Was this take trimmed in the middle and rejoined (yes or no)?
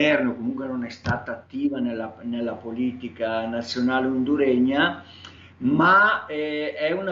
no